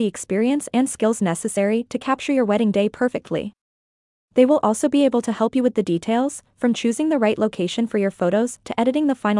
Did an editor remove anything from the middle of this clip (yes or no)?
no